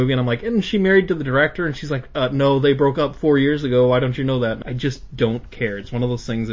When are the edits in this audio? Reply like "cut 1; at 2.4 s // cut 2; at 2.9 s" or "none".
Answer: cut 1; at 4.6 s